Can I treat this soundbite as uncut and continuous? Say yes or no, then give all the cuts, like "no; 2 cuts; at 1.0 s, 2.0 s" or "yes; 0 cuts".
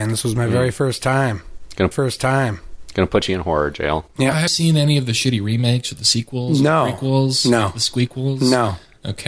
no; 2 cuts; at 1.9 s, 4.5 s